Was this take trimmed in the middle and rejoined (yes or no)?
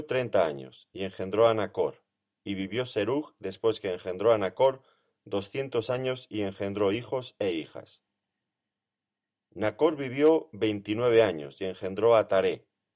no